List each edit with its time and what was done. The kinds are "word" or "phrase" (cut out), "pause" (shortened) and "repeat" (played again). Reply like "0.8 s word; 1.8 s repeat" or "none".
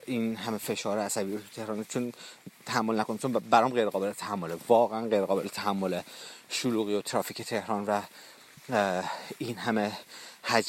none